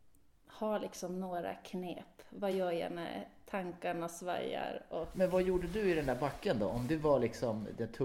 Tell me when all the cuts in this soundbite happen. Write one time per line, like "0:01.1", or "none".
none